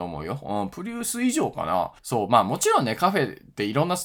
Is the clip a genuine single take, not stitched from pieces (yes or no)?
no